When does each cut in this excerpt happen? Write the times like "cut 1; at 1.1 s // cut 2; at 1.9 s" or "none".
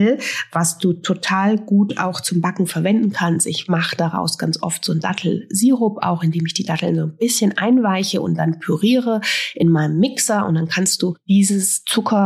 none